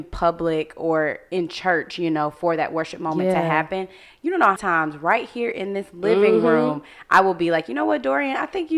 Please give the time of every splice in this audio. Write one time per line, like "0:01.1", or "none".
0:04.6